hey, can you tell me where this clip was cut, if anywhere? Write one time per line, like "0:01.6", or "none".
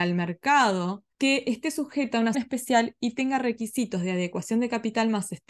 0:01.1
0:02.3